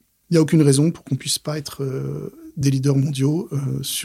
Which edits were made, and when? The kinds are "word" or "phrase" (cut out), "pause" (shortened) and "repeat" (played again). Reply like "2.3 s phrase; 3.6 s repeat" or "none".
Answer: none